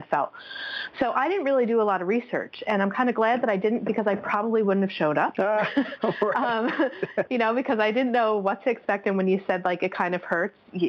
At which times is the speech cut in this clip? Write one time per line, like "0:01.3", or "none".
none